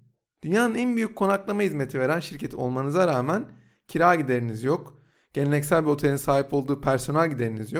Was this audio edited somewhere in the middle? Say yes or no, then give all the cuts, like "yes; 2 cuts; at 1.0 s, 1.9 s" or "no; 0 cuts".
no; 0 cuts